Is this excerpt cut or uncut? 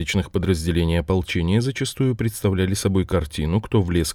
uncut